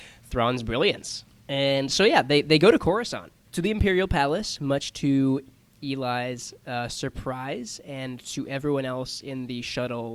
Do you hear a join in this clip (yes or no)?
no